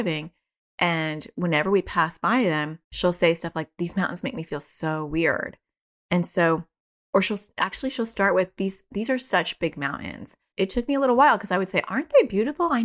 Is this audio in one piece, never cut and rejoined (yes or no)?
no